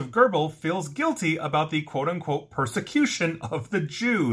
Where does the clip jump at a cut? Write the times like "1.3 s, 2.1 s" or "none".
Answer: none